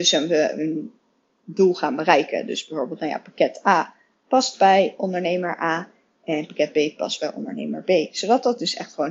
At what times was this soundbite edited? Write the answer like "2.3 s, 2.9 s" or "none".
none